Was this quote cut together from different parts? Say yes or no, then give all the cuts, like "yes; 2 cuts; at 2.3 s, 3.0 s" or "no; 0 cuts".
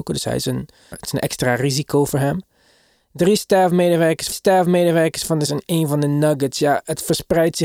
yes; 3 cuts; at 0.9 s, 4.3 s, 5.5 s